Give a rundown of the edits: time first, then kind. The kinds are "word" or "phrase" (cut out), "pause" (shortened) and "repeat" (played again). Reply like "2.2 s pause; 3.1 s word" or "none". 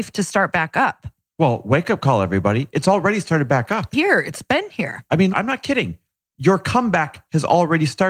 3.9 s word; 5.3 s word